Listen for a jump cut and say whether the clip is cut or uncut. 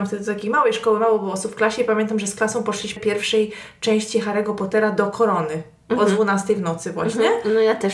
cut